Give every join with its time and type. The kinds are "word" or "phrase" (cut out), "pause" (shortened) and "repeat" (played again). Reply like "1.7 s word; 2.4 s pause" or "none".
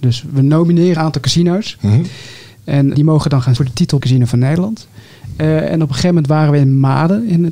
1.0 s word; 2.9 s word; 3.6 s word; 4.0 s word